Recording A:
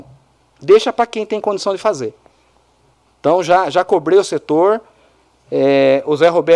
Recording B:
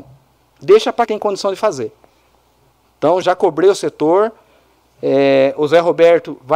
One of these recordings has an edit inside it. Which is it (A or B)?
B